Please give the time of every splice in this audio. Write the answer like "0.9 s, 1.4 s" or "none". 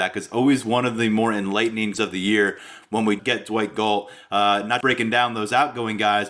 1.9 s, 3.2 s, 4.8 s